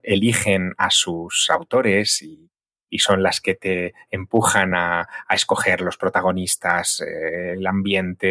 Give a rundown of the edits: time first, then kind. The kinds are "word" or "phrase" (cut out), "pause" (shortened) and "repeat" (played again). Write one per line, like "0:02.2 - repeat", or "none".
none